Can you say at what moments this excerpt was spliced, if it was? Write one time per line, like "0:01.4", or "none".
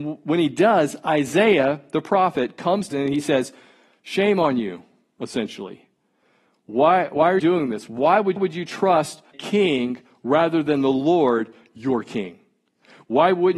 0:02.9
0:07.4
0:08.4
0:09.3